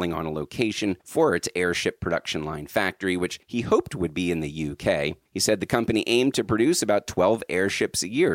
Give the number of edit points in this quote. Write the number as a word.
three